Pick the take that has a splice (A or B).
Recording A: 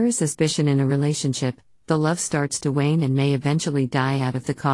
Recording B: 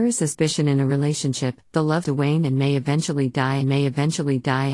B